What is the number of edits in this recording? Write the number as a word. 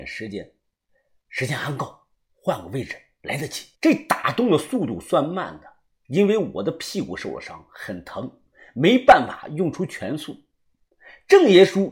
one